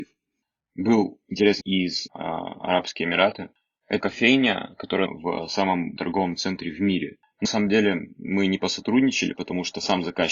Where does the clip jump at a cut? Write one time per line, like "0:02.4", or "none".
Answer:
0:01.6
0:02.1
0:04.0
0:05.1
0:06.0
0:07.5